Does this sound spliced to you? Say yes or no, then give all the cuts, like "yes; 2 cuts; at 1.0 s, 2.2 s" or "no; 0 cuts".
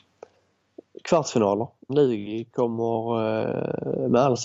yes; 1 cut; at 1.9 s